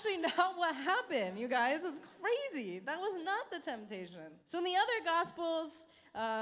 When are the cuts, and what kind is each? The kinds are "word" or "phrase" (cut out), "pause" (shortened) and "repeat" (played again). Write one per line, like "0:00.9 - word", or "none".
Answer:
0:04.4 - pause